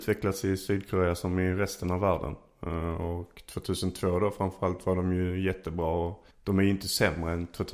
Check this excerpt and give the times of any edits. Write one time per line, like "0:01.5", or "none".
0:06.3